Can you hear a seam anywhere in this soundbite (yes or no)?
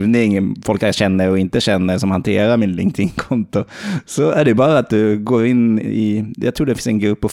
no